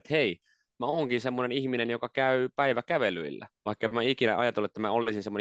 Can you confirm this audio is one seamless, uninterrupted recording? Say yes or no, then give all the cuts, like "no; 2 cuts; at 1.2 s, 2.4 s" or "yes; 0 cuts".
no; 1 cut; at 3.5 s